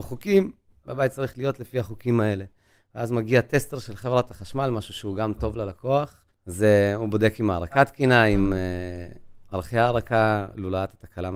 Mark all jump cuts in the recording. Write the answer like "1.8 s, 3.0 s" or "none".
6.3 s